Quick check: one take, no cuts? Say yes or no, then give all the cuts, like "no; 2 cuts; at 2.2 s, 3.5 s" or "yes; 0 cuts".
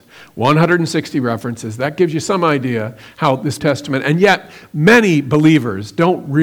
no; 1 cut; at 3.6 s